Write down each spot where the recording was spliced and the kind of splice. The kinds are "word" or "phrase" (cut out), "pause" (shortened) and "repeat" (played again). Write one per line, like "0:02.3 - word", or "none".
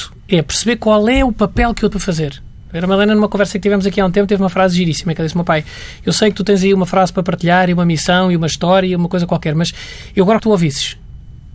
0:01.9 - word
0:10.4 - phrase